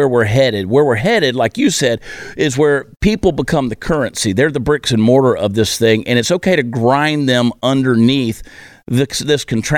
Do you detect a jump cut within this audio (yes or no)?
no